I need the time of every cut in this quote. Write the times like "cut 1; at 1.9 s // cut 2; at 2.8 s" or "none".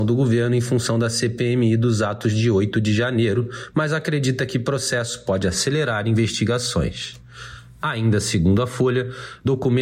none